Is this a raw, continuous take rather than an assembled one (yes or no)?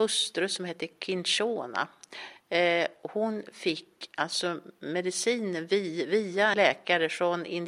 no